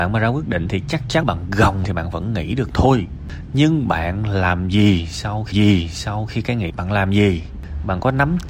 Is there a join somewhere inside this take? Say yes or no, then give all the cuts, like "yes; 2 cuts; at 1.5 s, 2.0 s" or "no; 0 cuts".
yes; 4 cuts; at 1.2 s, 1.8 s, 5.5 s, 6.7 s